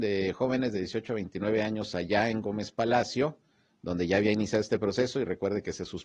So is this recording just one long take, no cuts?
yes; 0 cuts

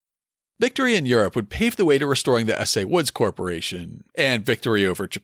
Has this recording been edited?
yes; 1 cut; at 4.1 s

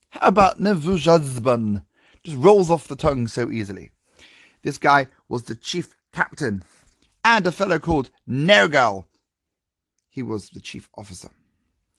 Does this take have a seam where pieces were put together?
no; 0 cuts

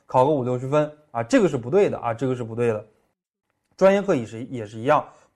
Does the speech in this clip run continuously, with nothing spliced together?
yes; 0 cuts

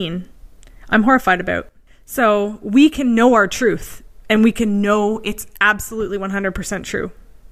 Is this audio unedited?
yes; 0 cuts

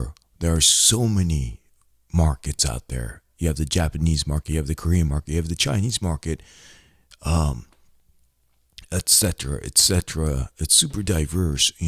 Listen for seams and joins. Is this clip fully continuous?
yes; 0 cuts

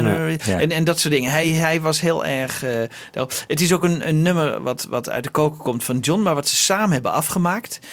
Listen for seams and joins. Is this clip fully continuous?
yes; 0 cuts

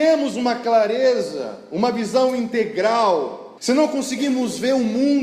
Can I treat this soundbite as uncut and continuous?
no; 1 cut; at 3.6 s

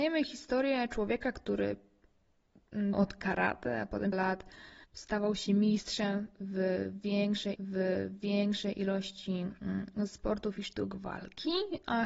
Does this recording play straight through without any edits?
no; 4 cuts; at 2.9 s, 4.1 s, 4.8 s, 7.6 s

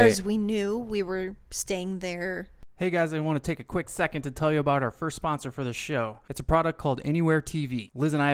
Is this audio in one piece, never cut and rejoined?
no; 1 cut; at 2.7 s

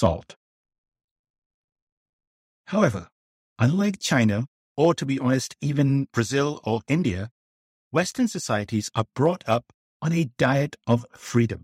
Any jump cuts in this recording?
no; 0 cuts

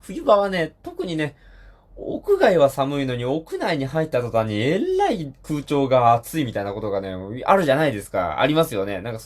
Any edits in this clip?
no; 0 cuts

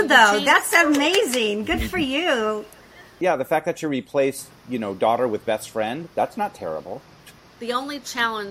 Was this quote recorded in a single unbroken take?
yes; 0 cuts

